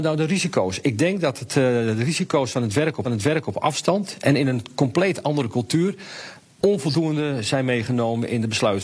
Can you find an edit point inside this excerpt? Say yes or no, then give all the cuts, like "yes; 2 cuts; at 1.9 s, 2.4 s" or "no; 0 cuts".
yes; 1 cut; at 3.0 s